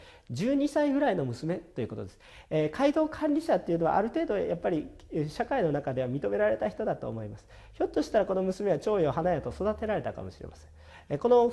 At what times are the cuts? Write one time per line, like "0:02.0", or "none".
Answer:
none